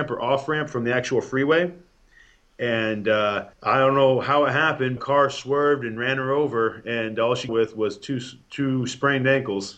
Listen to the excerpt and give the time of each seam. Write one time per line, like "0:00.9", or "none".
0:03.5
0:05.0
0:07.5